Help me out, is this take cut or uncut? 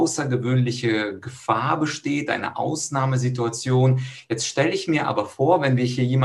uncut